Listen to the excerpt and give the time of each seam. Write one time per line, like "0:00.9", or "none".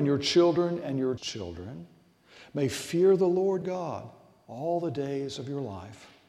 0:01.2
0:03.6